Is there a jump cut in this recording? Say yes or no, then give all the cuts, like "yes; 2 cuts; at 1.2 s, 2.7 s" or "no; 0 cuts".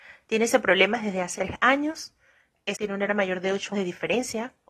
yes; 4 cuts; at 1.4 s, 2.7 s, 3.1 s, 3.7 s